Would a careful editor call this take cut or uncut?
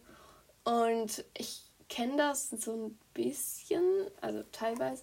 uncut